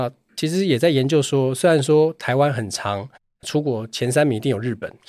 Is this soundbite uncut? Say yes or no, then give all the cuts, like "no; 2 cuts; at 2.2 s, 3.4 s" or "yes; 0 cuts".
no; 1 cut; at 3.4 s